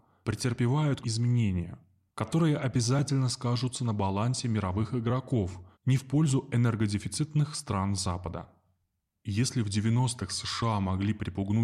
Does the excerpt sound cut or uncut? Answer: cut